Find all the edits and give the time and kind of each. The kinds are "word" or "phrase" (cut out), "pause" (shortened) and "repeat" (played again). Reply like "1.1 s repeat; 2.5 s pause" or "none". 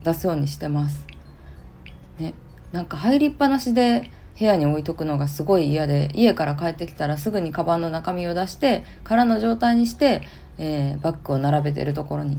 4.3 s pause